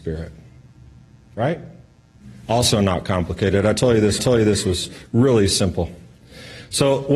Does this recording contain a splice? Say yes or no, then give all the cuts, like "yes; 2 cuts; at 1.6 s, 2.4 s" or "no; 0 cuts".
yes; 1 cut; at 4.2 s